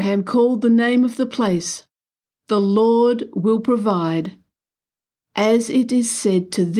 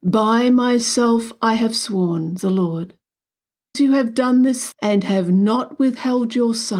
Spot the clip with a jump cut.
second; 3 cuts; at 2.4 s, 3.7 s, 4.7 s

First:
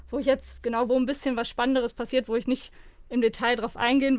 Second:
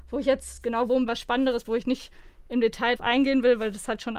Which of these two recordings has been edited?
second; 3 cuts; at 1.1 s, 1.6 s, 3.0 s

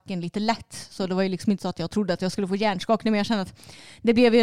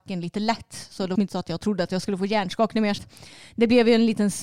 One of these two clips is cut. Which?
second; 2 cuts; at 1.1 s, 3.0 s

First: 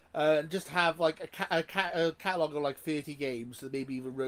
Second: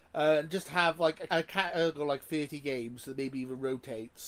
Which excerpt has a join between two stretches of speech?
second; 2 cuts; at 1.3 s, 1.9 s

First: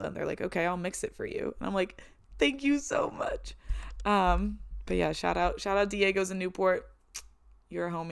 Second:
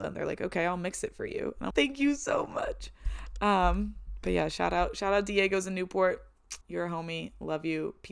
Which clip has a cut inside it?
second; 2 cuts; at 1.7 s, 6.6 s

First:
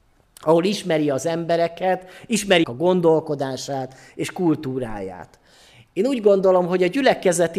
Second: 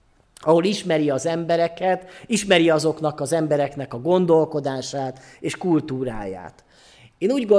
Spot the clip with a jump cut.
first; 1 cut; at 2.6 s

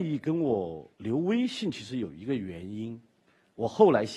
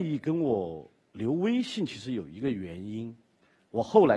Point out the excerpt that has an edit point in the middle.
first; 1 cut; at 0.9 s

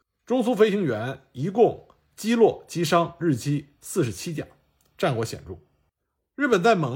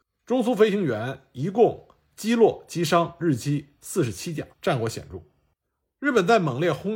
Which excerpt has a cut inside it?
second; 1 cut; at 4.5 s

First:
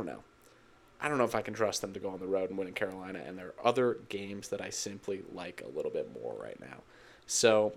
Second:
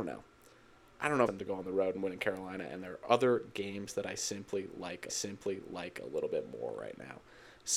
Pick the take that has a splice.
second; 2 cuts; at 1.3 s, 5.1 s

